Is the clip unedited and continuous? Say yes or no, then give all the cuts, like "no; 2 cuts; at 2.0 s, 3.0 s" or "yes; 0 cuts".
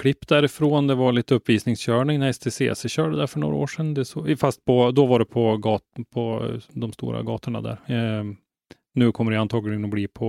yes; 0 cuts